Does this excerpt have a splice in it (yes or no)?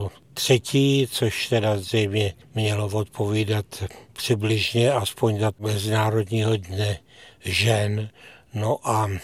yes